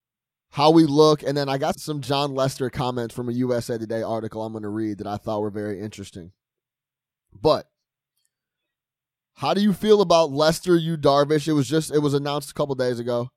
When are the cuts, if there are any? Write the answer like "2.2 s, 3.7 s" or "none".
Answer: 1.7 s